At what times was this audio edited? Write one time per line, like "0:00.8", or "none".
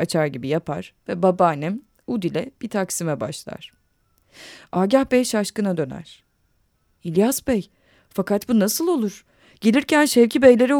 none

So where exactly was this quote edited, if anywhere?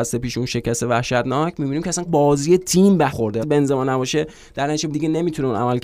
0:02.1
0:03.1
0:03.4
0:04.9

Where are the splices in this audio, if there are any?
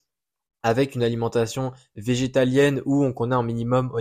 none

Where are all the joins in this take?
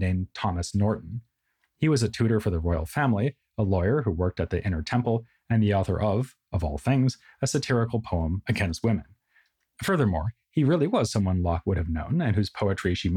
none

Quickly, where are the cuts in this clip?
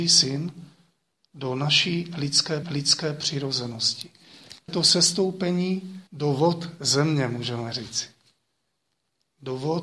0:02.6
0:04.7
0:06.1

